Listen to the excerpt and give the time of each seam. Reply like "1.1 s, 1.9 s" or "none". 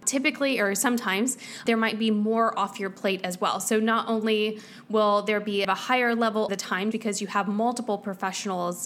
5.6 s, 6.5 s, 6.9 s

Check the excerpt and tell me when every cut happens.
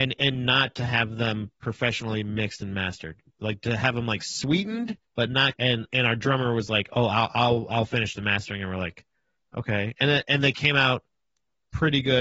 5.0 s, 5.5 s

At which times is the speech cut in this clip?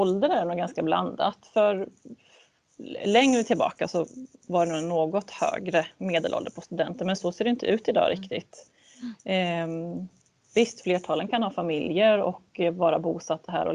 none

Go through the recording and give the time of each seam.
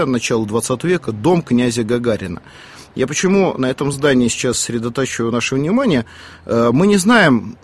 none

